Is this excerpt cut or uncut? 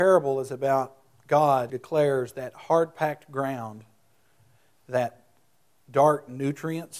cut